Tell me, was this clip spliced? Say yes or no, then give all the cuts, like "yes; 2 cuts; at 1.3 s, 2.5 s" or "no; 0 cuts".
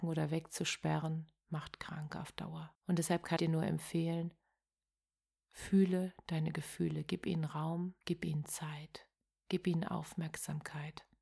yes; 3 cuts; at 2.8 s, 3.4 s, 8.0 s